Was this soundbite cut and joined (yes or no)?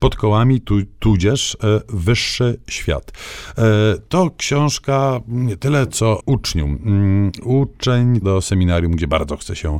yes